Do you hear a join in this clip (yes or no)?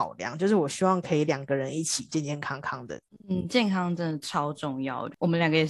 no